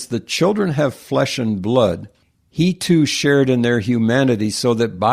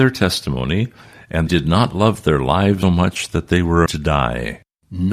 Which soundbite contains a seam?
second; 3 cuts; at 1.5 s, 2.8 s, 3.9 s

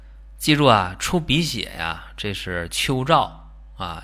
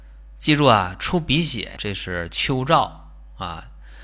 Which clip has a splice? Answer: second; 1 cut; at 1.8 s

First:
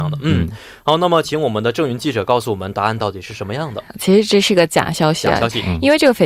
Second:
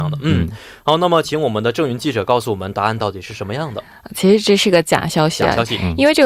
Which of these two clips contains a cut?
first; 1 cut; at 3.9 s

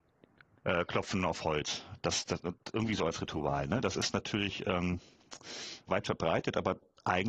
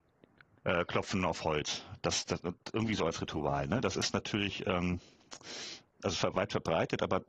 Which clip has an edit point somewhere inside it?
first; 1 cut; at 5.9 s

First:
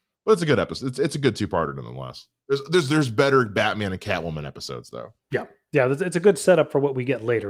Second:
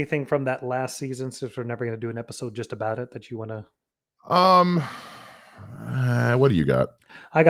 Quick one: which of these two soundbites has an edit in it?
first; 1 cut; at 5.2 s

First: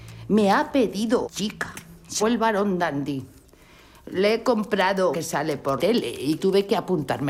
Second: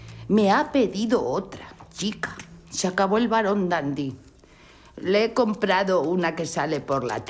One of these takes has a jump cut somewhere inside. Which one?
first; 5 cuts; at 1.2 s, 2.2 s, 5.1 s, 5.8 s, 6.4 s

